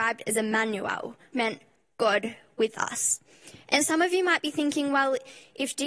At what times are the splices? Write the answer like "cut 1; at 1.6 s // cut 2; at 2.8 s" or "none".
cut 1; at 1.3 s // cut 2; at 3.8 s